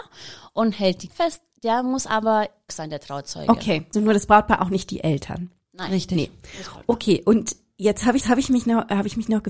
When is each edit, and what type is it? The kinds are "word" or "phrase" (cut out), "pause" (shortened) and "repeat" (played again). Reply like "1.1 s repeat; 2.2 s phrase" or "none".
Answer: 1.1 s word; 2.7 s word; 3.9 s word; 8.2 s repeat

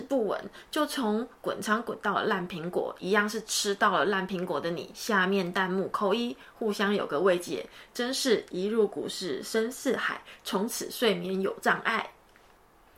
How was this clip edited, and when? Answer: 1.4 s word

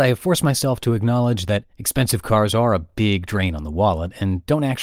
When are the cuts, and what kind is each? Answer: 1.7 s pause

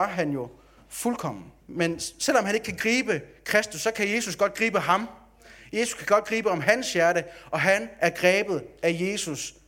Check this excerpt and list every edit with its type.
1.6 s pause

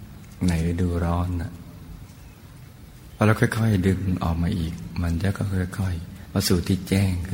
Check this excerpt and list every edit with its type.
6.3 s word

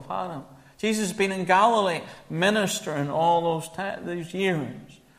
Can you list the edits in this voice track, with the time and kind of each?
none

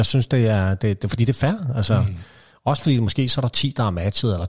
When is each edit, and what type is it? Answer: none

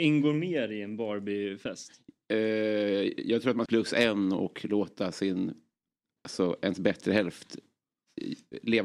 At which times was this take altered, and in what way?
3.7 s phrase

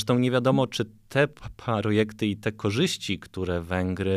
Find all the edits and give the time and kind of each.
none

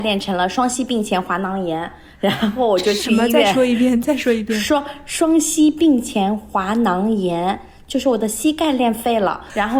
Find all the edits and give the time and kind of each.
none

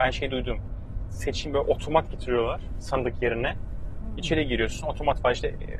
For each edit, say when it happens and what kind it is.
none

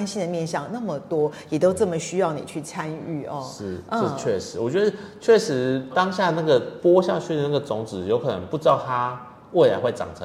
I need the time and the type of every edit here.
5.9 s word

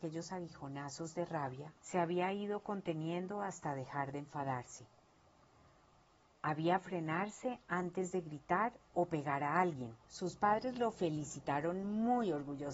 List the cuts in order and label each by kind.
1.8 s pause; 6.8 s word; 10.0 s pause

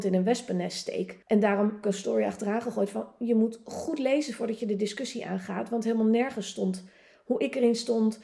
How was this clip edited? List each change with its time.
1.2 s pause; 1.8 s phrase

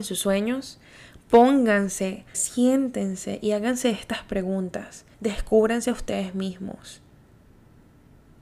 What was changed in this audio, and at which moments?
2.3 s word; 5.1 s pause

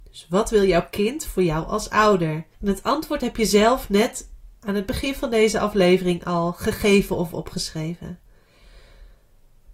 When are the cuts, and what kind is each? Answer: 2.5 s pause

